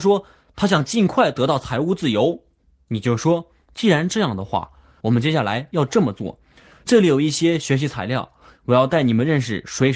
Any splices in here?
no; 0 cuts

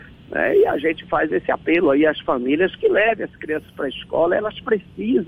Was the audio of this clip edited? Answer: no; 0 cuts

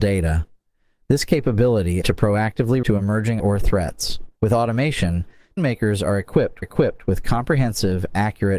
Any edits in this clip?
yes; 6 cuts; at 2.0 s, 2.8 s, 3.4 s, 4.3 s, 5.6 s, 6.6 s

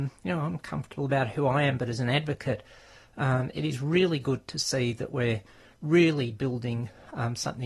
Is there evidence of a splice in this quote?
no; 0 cuts

